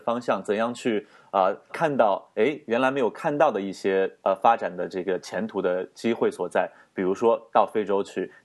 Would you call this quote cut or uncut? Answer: cut